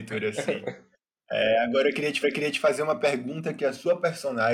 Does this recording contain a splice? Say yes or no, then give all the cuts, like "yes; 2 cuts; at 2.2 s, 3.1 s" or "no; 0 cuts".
yes; 1 cut; at 2.2 s